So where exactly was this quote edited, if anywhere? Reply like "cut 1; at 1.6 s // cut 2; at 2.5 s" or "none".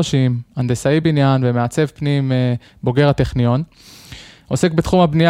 none